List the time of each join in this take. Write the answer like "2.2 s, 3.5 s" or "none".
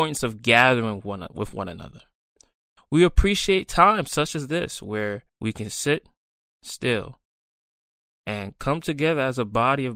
5.3 s